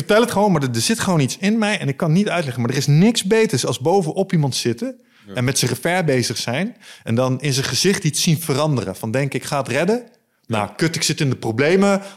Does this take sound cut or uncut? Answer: uncut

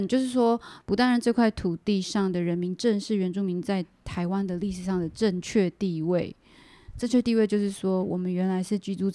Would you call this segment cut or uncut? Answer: uncut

